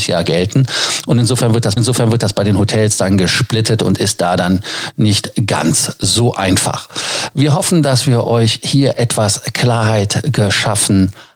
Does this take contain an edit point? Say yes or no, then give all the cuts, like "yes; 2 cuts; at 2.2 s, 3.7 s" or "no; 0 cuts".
yes; 1 cut; at 1.8 s